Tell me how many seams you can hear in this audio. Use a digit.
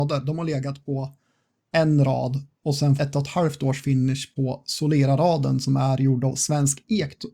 1